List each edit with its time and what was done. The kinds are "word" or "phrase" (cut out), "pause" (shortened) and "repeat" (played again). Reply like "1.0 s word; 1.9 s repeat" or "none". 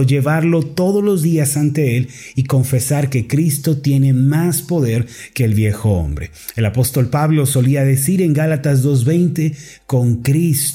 none